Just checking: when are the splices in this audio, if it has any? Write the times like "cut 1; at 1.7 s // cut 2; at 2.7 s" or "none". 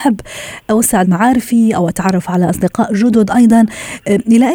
cut 1; at 1.0 s